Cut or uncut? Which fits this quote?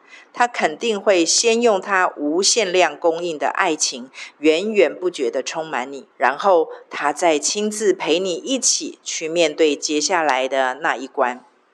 cut